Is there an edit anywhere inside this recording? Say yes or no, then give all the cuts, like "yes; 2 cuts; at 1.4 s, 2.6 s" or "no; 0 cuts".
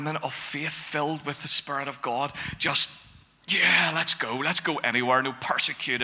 no; 0 cuts